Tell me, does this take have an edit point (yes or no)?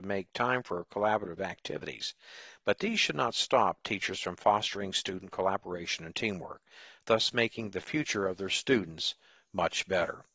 no